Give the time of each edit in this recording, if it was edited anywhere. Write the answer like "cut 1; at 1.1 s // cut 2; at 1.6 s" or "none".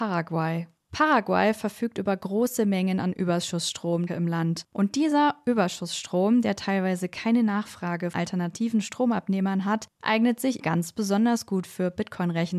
cut 1; at 4.1 s // cut 2; at 8.1 s // cut 3; at 10.6 s